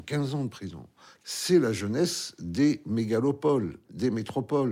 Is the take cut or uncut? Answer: uncut